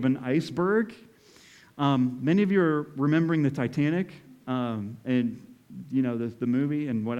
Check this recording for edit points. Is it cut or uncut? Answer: uncut